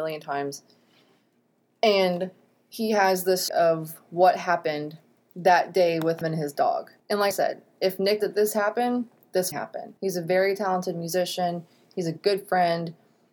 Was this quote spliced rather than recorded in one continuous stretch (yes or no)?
yes